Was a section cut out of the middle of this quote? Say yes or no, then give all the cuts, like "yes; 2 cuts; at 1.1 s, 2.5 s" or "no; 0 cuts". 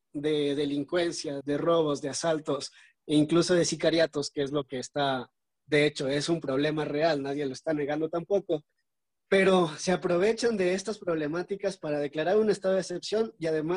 yes; 1 cut; at 1.4 s